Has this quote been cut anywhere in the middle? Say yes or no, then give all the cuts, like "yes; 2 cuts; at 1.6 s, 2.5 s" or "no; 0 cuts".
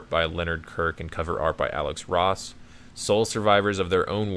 no; 0 cuts